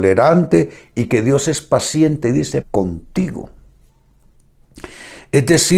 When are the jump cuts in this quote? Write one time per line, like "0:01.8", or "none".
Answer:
0:02.6

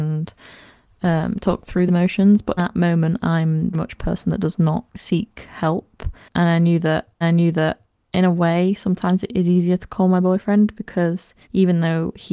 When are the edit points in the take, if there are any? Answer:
0:01.9
0:02.6
0:03.7
0:04.9
0:07.2
0:11.4

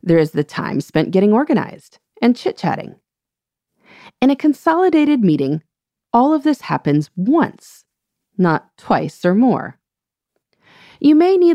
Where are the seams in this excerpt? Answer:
none

